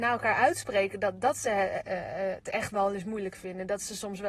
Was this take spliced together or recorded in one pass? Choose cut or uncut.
uncut